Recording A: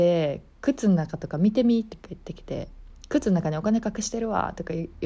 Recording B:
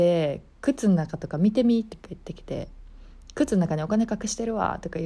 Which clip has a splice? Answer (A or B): A